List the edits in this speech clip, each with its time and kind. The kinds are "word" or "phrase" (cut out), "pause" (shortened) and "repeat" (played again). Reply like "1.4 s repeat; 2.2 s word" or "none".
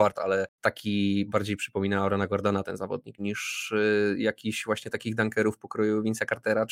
3.2 s word